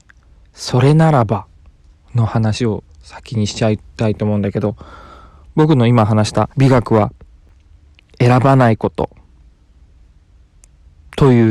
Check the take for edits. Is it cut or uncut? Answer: cut